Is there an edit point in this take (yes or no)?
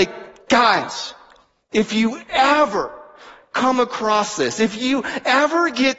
no